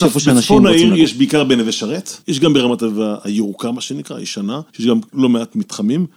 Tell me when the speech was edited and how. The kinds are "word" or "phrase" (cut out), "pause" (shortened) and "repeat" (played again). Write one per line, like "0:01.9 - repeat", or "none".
0:02.2 - pause
0:04.7 - pause
0:05.1 - pause